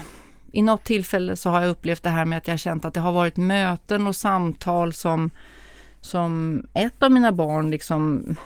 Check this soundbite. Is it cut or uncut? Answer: uncut